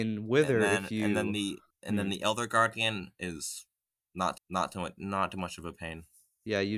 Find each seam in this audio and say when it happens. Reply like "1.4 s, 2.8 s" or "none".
1.7 s, 4.4 s